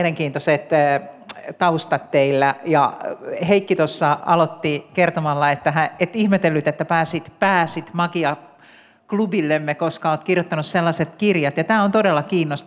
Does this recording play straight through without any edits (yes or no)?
yes